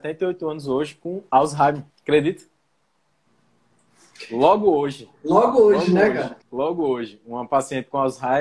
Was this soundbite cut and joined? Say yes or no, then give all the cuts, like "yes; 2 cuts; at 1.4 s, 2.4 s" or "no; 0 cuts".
yes; 2 cuts; at 1.9 s, 6.4 s